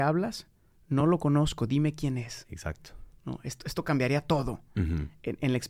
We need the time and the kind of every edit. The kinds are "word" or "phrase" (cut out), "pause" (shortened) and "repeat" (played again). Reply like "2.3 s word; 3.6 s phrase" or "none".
none